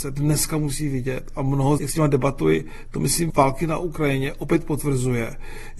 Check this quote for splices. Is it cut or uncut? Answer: cut